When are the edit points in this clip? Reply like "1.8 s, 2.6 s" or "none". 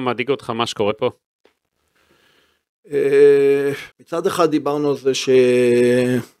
3.9 s